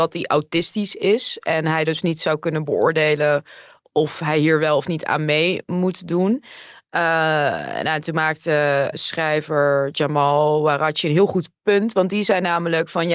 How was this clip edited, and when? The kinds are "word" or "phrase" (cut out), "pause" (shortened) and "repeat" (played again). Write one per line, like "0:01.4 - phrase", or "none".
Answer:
0:08.9 - word